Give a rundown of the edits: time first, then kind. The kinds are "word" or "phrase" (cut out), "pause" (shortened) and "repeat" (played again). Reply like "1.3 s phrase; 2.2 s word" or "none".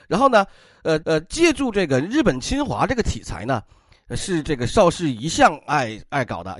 1.0 s repeat